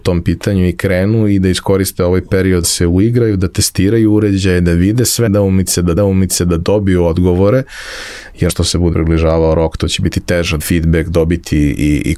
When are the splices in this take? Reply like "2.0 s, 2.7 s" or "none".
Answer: 2.6 s, 5.3 s, 6.0 s, 8.5 s, 8.9 s, 10.6 s